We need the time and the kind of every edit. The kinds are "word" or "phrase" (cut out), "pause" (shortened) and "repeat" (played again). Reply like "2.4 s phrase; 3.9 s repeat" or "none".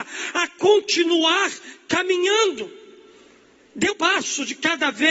3.9 s word